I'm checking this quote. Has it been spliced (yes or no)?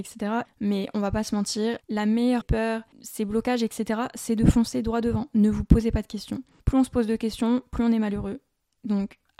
yes